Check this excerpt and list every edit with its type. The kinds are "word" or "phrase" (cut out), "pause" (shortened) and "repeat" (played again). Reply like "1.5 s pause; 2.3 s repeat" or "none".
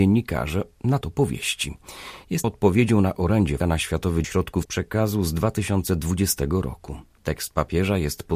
1.0 s word; 2.4 s word; 3.6 s word; 4.2 s word; 4.6 s word